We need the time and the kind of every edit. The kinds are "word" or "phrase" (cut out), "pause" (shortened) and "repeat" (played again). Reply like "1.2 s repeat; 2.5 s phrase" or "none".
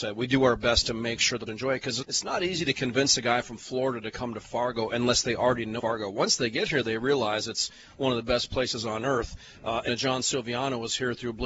1.5 s word; 2.0 s word; 5.8 s word; 9.9 s word